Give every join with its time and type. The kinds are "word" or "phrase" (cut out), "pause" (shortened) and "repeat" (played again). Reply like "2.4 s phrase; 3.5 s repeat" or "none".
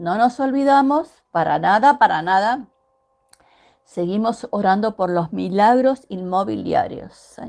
none